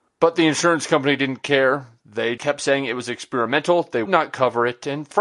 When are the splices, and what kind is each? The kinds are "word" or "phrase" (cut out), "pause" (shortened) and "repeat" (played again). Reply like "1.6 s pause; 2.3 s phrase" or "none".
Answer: 2.4 s word; 4.1 s word